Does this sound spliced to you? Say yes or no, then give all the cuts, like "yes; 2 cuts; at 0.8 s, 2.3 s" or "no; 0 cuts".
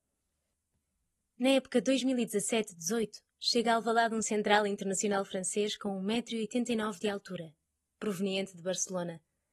no; 0 cuts